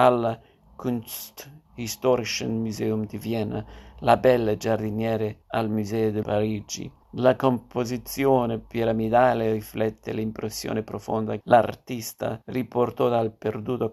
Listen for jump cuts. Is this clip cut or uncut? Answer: cut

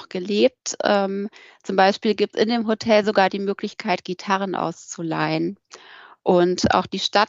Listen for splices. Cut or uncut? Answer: cut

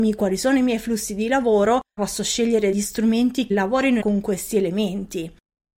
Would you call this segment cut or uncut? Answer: cut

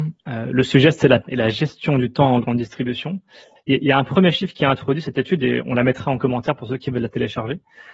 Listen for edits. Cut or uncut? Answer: cut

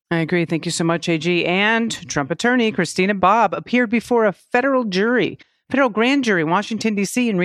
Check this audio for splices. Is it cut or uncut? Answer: uncut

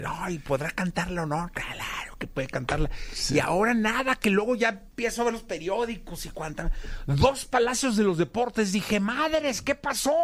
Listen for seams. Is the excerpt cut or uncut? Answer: uncut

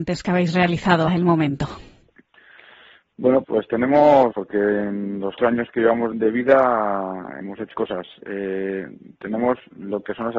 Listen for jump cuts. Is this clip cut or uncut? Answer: cut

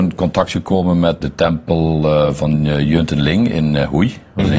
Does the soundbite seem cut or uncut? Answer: cut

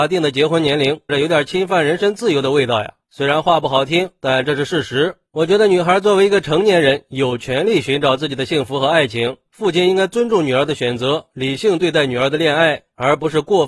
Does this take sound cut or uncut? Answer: cut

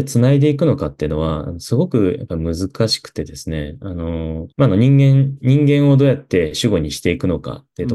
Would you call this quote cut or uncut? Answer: cut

